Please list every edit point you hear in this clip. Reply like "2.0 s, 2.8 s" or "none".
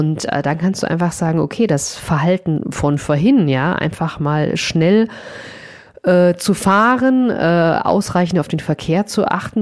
none